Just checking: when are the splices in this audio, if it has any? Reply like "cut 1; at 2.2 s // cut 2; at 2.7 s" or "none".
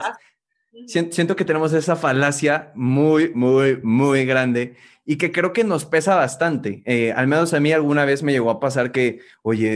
none